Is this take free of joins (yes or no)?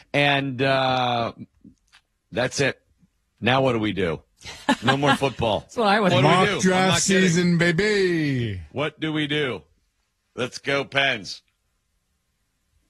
no